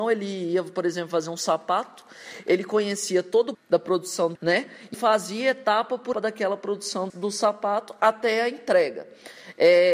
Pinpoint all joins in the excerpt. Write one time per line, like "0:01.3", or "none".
0:03.5
0:04.4
0:04.9
0:06.1
0:07.1